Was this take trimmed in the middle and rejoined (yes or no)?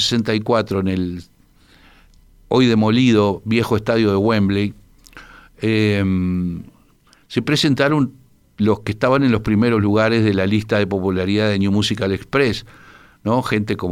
no